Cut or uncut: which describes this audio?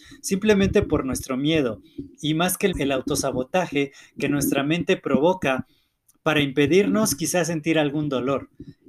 cut